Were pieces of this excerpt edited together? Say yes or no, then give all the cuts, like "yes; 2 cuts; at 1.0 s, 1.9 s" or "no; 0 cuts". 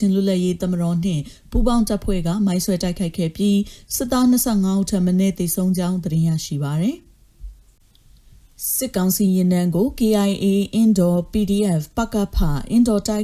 no; 0 cuts